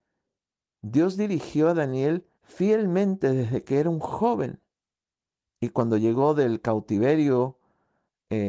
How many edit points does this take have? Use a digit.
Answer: 2